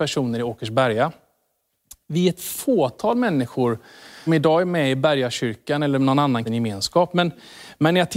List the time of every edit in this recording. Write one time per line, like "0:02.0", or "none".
0:04.3
0:06.5